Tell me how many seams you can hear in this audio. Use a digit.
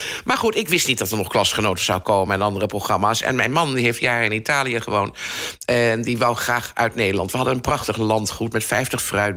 0